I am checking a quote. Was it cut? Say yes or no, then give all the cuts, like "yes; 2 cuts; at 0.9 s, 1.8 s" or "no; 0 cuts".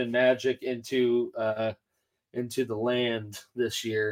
no; 0 cuts